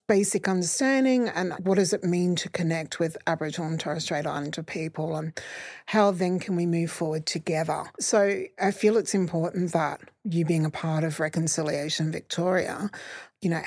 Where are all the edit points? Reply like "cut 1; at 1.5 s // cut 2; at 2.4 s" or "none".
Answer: cut 1; at 7.9 s